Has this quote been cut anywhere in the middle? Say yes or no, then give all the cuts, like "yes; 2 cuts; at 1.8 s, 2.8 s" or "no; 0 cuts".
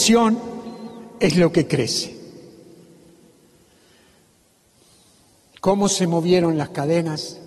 no; 0 cuts